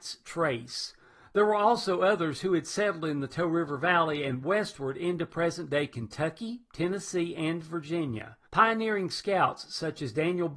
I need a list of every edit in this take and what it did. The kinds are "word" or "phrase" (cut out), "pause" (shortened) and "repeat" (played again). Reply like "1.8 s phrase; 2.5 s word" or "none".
8.5 s pause